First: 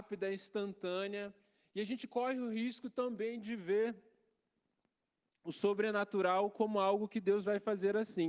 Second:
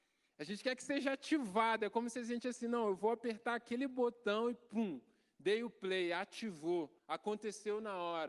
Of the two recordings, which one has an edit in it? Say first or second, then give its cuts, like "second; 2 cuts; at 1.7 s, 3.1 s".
second; 1 cut; at 7.0 s